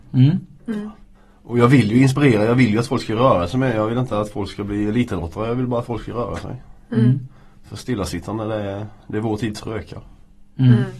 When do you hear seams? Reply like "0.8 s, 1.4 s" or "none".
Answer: none